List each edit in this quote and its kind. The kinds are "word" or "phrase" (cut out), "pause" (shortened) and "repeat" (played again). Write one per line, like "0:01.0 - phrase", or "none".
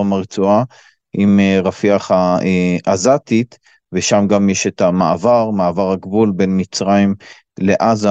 none